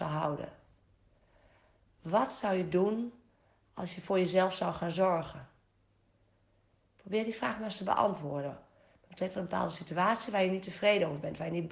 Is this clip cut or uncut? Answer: uncut